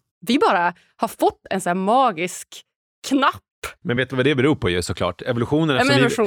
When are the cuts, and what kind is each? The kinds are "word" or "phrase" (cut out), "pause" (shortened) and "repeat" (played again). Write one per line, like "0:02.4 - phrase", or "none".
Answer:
none